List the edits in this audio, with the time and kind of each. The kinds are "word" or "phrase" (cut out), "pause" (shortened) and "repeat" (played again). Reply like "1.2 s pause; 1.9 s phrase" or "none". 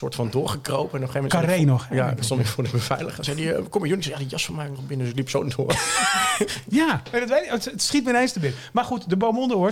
none